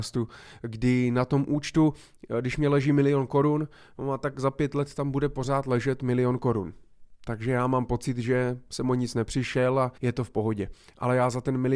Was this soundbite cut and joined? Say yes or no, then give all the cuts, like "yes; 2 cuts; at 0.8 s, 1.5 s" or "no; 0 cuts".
yes; 1 cut; at 10.0 s